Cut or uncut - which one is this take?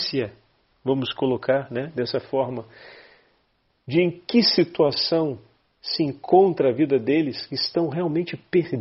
uncut